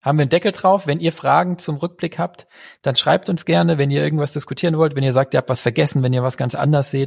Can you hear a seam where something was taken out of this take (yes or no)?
no